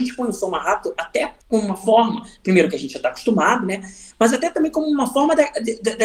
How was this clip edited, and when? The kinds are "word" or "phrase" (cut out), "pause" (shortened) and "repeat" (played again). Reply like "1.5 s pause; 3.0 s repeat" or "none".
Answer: 1.4 s pause